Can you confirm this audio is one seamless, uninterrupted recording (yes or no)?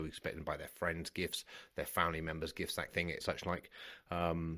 no